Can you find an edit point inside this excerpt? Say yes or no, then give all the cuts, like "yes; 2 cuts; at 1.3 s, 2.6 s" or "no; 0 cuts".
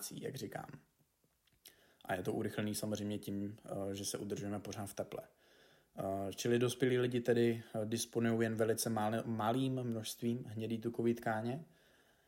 no; 0 cuts